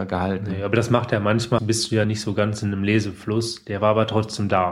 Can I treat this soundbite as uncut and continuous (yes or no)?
no